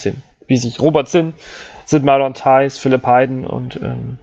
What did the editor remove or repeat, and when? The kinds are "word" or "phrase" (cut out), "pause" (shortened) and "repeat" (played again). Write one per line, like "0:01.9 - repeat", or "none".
none